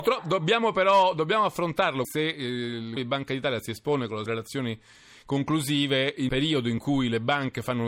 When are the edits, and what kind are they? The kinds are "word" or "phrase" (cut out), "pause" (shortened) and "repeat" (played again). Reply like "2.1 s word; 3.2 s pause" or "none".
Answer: 2.0 s phrase; 3.0 s word; 4.3 s word; 6.3 s word